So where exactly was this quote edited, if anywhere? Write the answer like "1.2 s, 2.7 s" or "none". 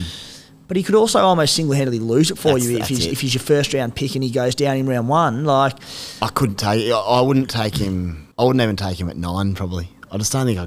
8.3 s